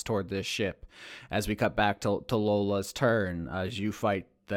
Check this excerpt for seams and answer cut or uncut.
uncut